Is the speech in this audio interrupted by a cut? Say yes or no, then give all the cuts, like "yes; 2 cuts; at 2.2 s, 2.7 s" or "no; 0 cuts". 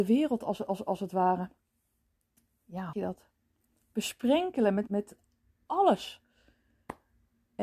yes; 2 cuts; at 2.9 s, 4.9 s